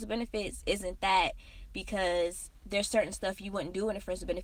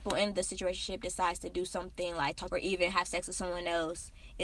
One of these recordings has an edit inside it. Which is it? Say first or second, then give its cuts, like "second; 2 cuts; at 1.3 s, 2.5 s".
second; 1 cut; at 2.5 s